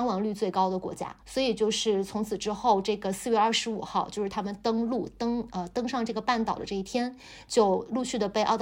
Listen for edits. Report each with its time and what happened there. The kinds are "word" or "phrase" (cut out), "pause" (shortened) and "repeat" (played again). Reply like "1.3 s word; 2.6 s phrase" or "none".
1.2 s pause